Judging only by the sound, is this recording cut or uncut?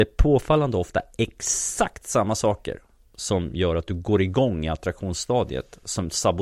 uncut